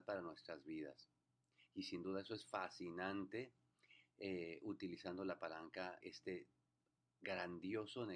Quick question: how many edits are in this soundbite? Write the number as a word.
one